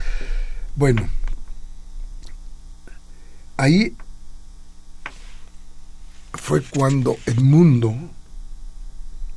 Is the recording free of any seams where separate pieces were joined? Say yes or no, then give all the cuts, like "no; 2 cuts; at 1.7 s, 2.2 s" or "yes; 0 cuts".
yes; 0 cuts